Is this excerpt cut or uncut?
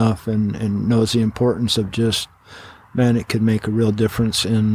uncut